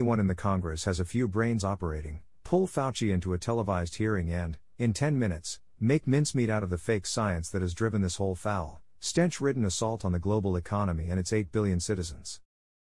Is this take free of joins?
no; 1 cut; at 1.6 s

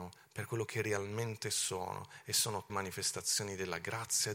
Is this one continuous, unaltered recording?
no; 1 cut; at 2.7 s

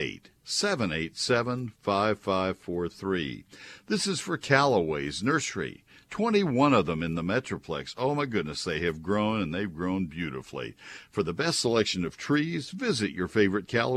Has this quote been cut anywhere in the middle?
no; 0 cuts

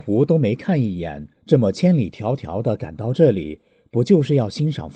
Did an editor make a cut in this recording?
yes; 1 cut; at 1.4 s

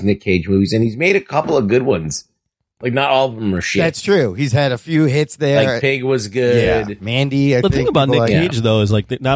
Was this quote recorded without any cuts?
yes; 0 cuts

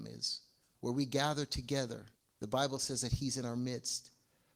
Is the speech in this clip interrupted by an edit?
yes; 1 cut; at 2.1 s

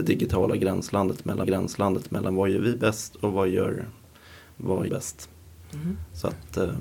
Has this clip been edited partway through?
yes; 2 cuts; at 1.4 s, 4.9 s

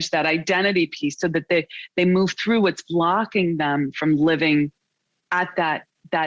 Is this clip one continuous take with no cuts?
yes; 0 cuts

